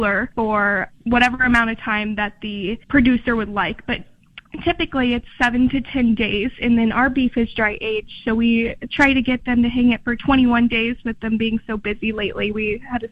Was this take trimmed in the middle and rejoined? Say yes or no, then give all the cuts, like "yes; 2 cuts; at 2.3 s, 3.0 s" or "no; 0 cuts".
yes; 1 cut; at 2.8 s